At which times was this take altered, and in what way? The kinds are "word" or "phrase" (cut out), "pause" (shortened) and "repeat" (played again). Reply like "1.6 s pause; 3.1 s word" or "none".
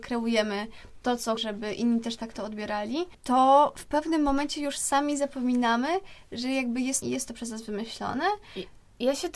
1.4 s word; 7.0 s phrase